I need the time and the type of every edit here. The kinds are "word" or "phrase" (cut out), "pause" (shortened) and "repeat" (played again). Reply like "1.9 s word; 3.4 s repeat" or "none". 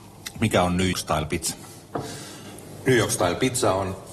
0.9 s word